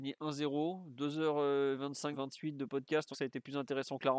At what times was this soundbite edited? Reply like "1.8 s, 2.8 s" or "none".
2.1 s, 3.1 s

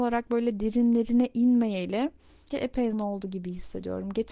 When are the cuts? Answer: 2.5 s, 2.9 s

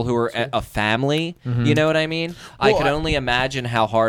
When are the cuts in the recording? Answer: none

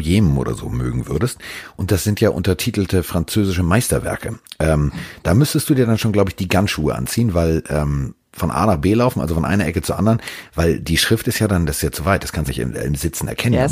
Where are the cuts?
6.7 s, 12.5 s

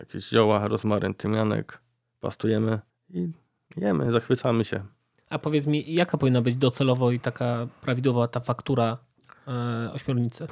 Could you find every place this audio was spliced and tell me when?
none

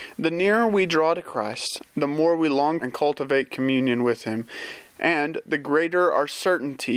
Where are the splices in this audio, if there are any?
2.8 s

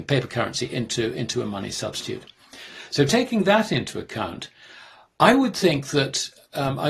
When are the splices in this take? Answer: none

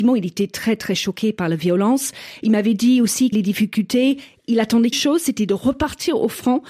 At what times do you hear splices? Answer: 3.3 s, 4.9 s

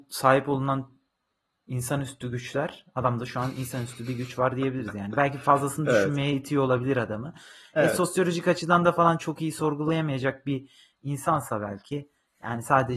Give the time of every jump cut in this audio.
none

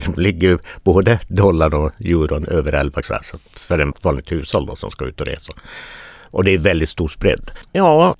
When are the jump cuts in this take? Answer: 3.0 s, 3.9 s

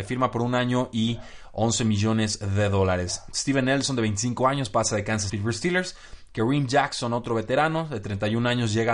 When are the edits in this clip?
5.3 s

